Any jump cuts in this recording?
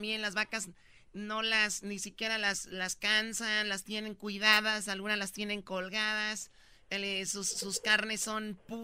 no; 0 cuts

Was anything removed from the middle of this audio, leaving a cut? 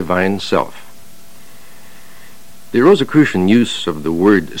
no; 0 cuts

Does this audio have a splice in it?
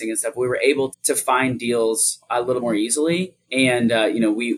yes; 3 cuts; at 0.9 s, 2.6 s, 3.4 s

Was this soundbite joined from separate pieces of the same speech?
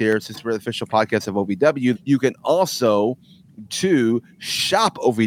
yes; 2 cuts; at 1.9 s, 3.7 s

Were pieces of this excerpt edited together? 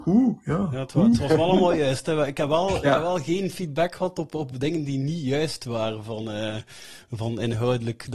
no; 0 cuts

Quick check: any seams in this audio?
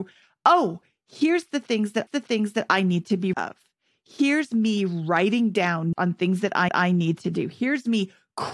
yes; 4 cuts; at 2.1 s, 3.3 s, 5.9 s, 6.7 s

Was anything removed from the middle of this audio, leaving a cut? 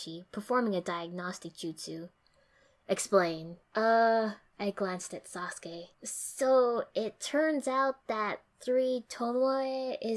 yes; 2 cuts; at 3.6 s, 5.9 s

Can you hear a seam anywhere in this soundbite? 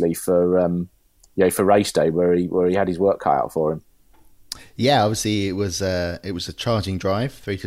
no; 0 cuts

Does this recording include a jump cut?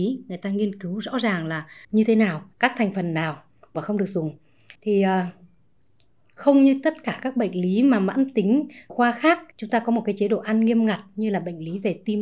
yes; 6 cuts; at 1.8 s, 2.5 s, 3.7 s, 4.8 s, 8.9 s, 9.5 s

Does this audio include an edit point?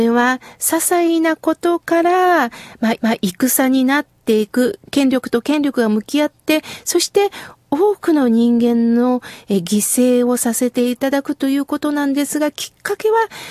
yes; 1 cut; at 3.0 s

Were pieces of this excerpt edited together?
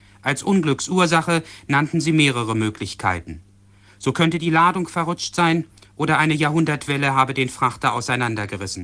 no; 0 cuts

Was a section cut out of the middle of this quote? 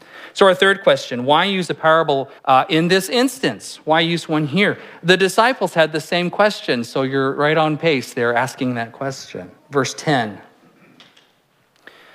yes; 2 cuts; at 2.4 s, 9.6 s

